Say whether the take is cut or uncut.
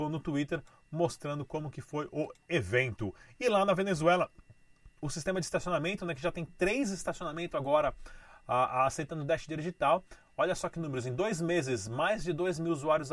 uncut